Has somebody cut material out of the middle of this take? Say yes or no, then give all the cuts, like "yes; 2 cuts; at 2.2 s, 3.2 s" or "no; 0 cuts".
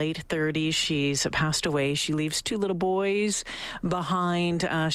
no; 0 cuts